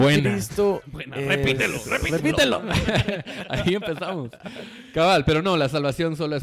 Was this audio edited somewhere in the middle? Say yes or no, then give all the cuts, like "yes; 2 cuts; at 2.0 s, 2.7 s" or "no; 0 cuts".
no; 0 cuts